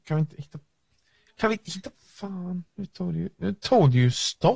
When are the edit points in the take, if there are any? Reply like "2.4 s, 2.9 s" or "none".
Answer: 1.9 s